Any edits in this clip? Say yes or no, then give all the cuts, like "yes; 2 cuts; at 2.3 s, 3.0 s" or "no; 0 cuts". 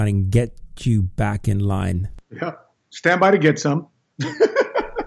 no; 0 cuts